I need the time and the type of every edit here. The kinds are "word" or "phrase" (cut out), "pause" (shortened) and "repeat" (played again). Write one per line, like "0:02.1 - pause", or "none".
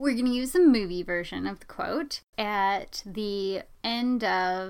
0:02.3 - phrase